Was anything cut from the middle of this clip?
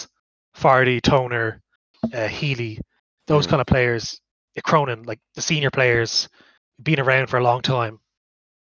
no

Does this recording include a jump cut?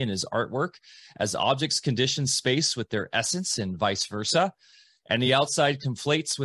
no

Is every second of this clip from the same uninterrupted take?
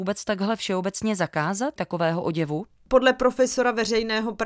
no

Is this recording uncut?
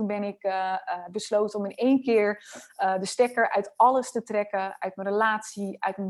yes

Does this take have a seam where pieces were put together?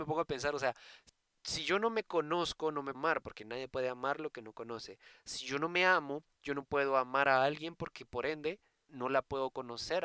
yes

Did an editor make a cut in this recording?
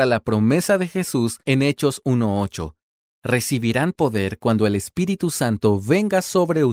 no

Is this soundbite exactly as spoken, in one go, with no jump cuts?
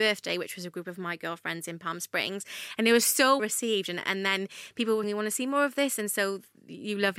no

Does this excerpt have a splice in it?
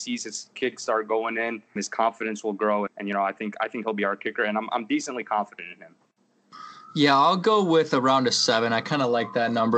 yes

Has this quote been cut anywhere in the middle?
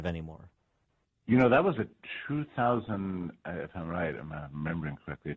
no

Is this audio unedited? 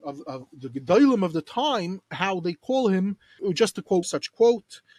no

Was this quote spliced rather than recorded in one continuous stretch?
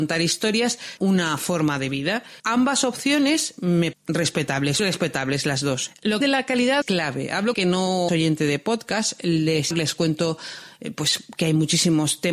yes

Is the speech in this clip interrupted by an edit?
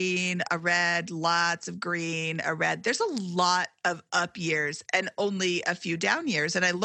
no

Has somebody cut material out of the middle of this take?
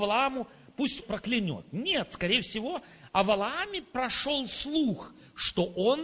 yes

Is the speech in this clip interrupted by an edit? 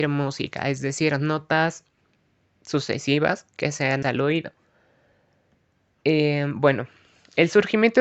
yes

